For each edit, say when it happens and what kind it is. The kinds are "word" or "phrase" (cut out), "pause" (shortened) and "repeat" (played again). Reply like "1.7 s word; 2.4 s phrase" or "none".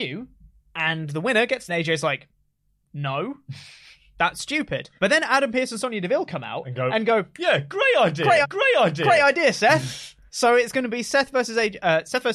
1.7 s phrase; 5.0 s pause; 8.4 s repeat; 10.3 s pause